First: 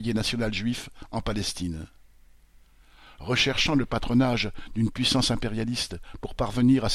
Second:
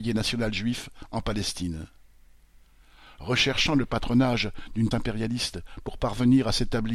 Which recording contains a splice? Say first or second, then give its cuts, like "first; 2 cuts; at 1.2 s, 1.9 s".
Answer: second; 1 cut; at 4.9 s